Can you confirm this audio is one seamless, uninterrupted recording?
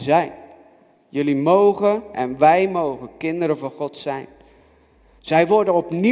yes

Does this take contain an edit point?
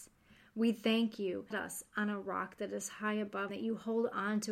yes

